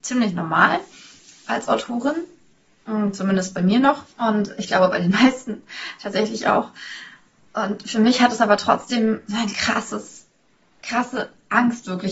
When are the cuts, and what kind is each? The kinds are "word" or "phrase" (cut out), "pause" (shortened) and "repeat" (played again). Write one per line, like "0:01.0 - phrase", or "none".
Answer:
0:04.1 - pause